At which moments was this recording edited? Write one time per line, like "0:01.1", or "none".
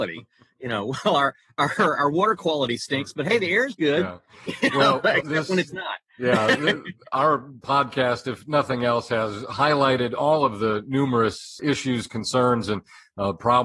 0:11.6